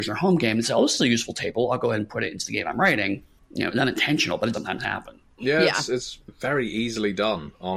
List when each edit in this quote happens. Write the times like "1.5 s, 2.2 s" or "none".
3.4 s, 4.5 s, 6.3 s